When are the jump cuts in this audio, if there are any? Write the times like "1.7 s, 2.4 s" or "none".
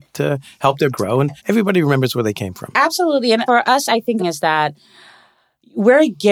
0.9 s, 1.4 s, 3.5 s, 4.2 s

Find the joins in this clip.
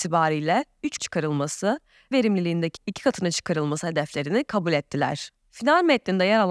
1.0 s, 2.1 s, 2.8 s

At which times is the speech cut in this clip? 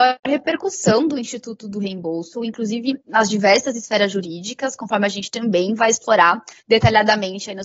3.0 s, 6.6 s

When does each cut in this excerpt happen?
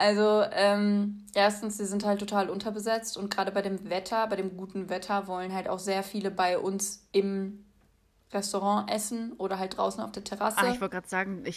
none

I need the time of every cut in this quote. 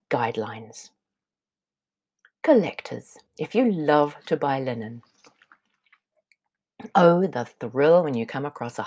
3.3 s

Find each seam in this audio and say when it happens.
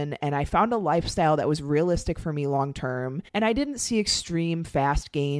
3.3 s

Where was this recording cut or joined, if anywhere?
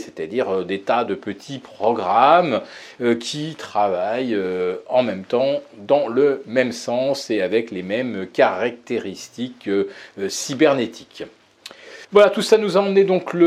12.0 s

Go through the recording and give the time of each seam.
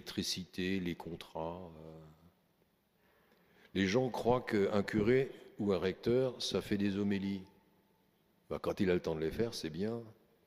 none

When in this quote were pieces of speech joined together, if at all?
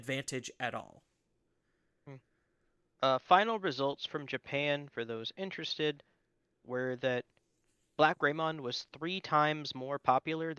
8.2 s

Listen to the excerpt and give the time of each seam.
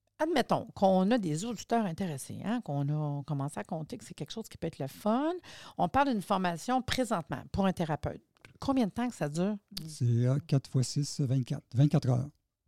none

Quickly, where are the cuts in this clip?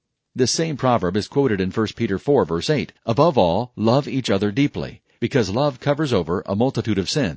3.0 s

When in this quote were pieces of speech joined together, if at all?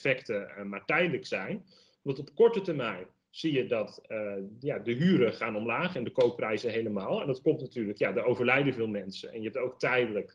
none

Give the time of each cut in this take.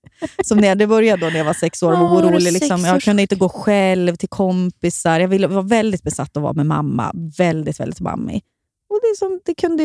none

